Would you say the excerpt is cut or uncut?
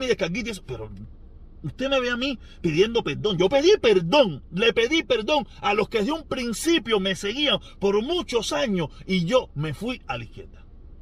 uncut